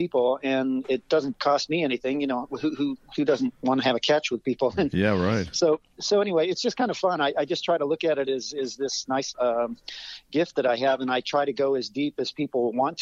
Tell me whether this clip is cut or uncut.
cut